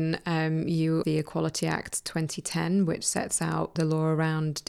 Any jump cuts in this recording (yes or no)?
yes